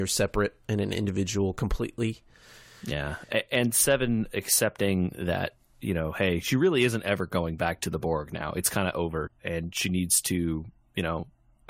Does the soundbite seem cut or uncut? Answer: uncut